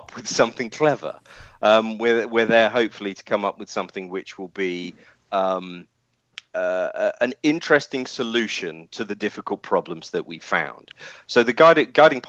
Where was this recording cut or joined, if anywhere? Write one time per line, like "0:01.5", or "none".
none